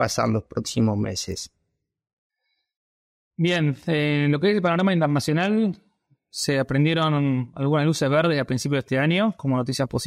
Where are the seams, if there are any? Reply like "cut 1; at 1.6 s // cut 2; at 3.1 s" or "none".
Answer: none

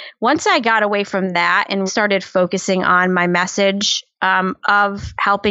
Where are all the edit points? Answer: cut 1; at 1.9 s

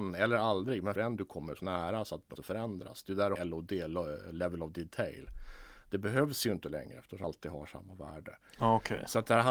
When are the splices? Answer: cut 1; at 1.0 s // cut 2; at 1.6 s // cut 3; at 2.4 s // cut 4; at 3.4 s // cut 5; at 7.2 s

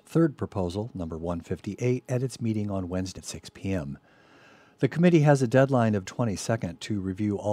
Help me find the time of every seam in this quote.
cut 1; at 3.2 s // cut 2; at 6.1 s

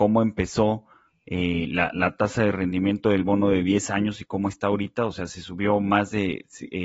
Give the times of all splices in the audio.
none

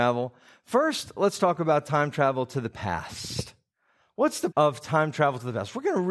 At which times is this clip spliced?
cut 1; at 4.5 s

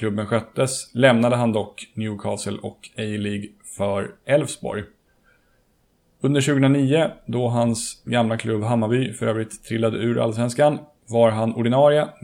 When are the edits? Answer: none

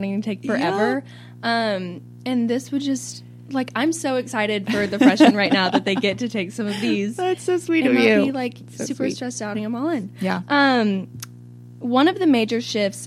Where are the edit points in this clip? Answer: cut 1; at 9.5 s

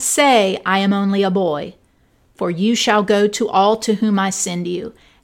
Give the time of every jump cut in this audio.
none

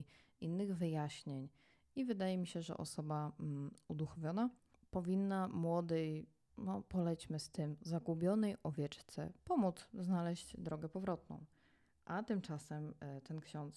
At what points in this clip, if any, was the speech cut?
none

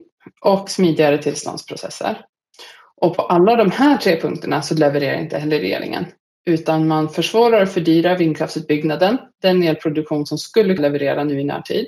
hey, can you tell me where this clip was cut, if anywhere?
cut 1; at 10.8 s

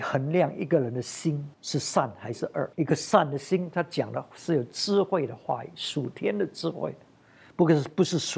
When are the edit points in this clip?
cut 1; at 1.5 s // cut 2; at 2.7 s

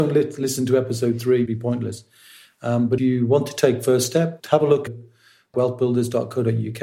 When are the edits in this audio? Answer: cut 1; at 1.5 s // cut 2; at 3.0 s // cut 3; at 4.4 s // cut 4; at 4.9 s // cut 5; at 5.5 s

